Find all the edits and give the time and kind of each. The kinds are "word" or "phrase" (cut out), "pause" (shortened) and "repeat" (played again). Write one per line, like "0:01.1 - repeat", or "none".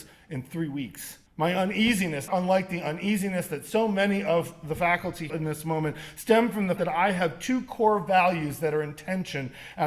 0:01.3 - pause
0:02.3 - word
0:05.3 - phrase
0:06.8 - word